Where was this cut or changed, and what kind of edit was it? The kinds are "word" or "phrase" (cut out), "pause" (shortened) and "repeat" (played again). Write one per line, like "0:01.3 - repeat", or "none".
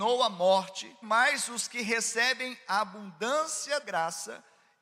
0:01.0 - word
0:03.8 - word